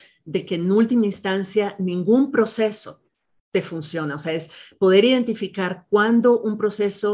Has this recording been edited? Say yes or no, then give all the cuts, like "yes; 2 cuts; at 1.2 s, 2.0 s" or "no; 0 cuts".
no; 0 cuts